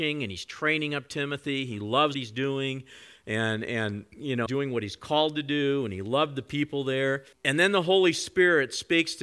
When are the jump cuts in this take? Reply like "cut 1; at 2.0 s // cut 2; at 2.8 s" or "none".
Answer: cut 1; at 2.1 s // cut 2; at 4.5 s // cut 3; at 7.3 s